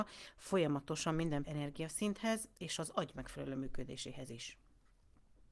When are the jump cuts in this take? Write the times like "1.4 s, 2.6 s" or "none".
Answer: 1.4 s

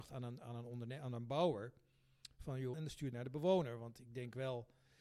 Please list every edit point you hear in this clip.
2.7 s, 3.1 s

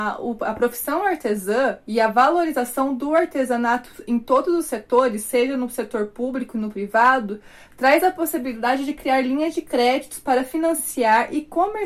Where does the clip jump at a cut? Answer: none

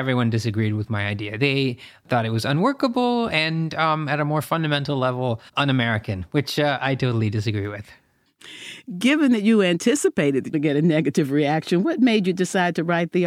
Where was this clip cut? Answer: 5.5 s, 10.5 s

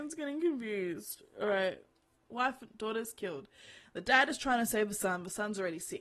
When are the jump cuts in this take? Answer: none

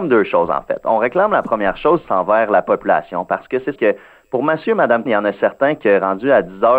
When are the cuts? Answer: 2.0 s, 3.8 s, 5.1 s

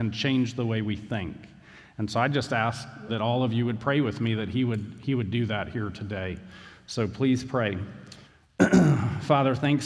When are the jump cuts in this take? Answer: 3.1 s, 8.2 s

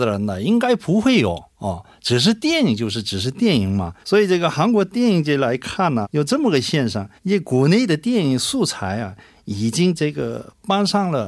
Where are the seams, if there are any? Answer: 1.5 s, 4.0 s, 6.0 s, 7.2 s

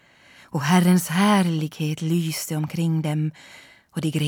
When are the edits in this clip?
none

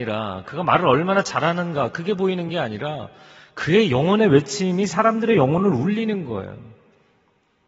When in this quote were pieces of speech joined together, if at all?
none

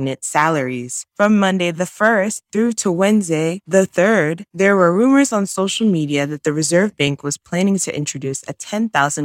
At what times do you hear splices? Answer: 1.1 s

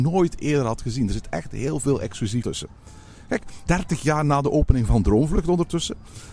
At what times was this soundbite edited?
2.4 s, 3.7 s

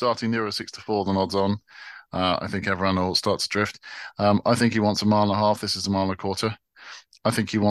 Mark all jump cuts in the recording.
none

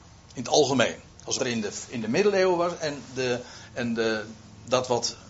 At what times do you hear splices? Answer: 1.4 s

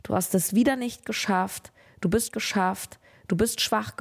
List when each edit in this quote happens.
2.3 s

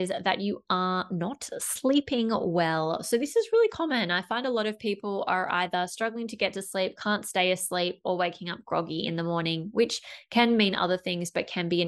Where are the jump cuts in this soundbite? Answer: none

